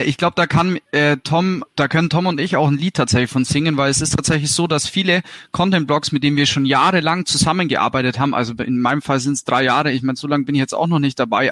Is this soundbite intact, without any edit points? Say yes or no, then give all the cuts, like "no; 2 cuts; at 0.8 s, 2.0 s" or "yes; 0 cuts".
no; 1 cut; at 1.7 s